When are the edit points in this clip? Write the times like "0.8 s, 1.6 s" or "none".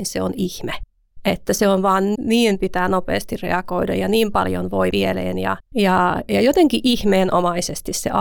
2.1 s, 4.9 s, 5.6 s